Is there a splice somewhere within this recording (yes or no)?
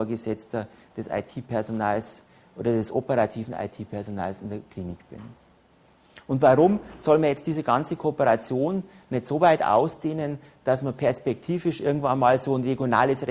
no